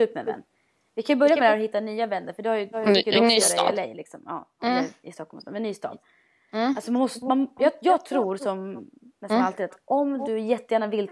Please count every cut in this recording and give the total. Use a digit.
0